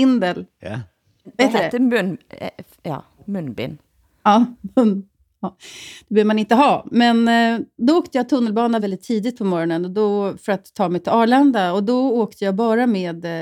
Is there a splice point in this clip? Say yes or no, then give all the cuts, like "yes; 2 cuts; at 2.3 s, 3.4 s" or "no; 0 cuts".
yes; 1 cut; at 8.8 s